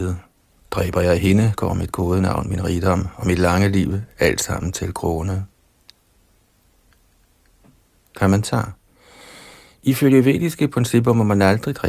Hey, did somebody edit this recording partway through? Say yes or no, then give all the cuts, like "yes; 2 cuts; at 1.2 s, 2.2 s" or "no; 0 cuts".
no; 0 cuts